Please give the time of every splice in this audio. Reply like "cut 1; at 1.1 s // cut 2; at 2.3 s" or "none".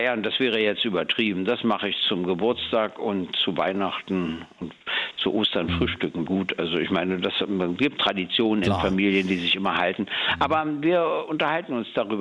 cut 1; at 6.3 s // cut 2; at 8.0 s